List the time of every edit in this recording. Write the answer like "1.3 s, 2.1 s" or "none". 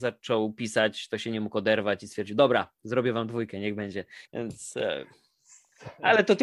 4.3 s